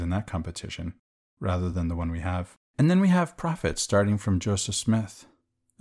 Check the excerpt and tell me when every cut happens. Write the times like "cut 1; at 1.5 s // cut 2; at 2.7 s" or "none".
none